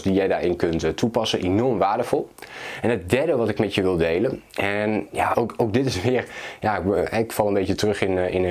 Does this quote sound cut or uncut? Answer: cut